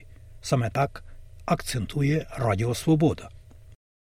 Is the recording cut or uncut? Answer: uncut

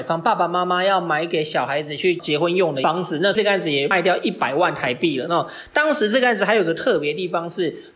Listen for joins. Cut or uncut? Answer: uncut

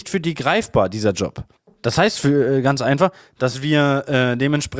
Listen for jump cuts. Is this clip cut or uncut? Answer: uncut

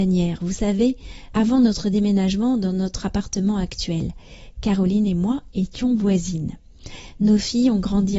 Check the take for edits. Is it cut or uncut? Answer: uncut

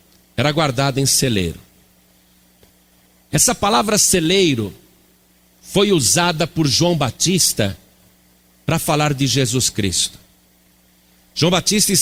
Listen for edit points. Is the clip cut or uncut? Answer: uncut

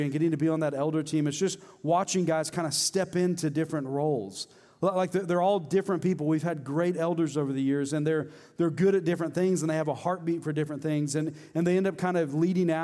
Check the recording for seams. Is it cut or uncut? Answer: uncut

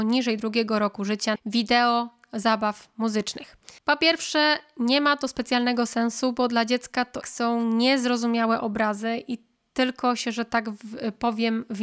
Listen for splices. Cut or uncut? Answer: cut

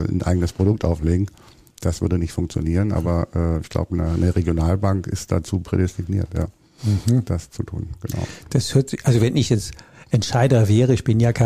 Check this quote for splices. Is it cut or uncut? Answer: uncut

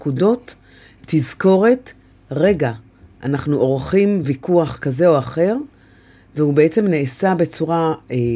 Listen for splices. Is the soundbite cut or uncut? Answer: uncut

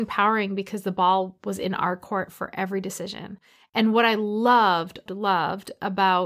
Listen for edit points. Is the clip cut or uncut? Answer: cut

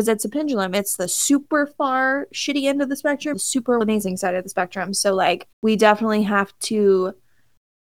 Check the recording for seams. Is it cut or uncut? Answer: cut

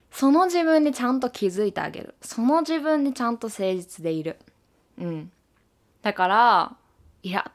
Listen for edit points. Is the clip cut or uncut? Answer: uncut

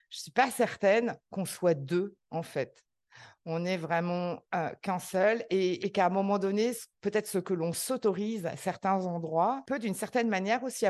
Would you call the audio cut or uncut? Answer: uncut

